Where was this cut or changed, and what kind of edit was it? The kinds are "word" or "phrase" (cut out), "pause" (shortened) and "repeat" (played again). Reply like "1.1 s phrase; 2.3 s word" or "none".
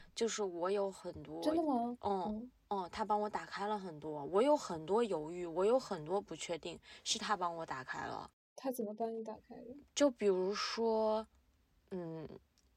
none